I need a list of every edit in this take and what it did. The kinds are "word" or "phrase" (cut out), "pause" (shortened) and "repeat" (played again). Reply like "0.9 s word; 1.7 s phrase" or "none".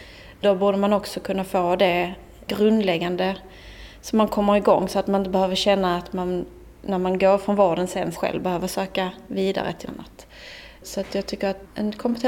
8.1 s word; 9.9 s word